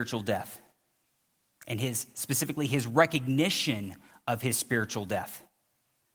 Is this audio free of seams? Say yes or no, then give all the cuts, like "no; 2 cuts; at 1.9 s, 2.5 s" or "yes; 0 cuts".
yes; 0 cuts